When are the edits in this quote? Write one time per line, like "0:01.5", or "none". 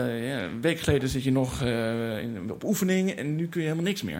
none